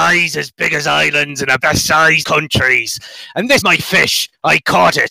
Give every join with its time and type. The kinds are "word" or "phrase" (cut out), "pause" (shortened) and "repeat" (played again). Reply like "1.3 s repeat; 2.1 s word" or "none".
1.6 s word; 2.2 s word; 3.6 s word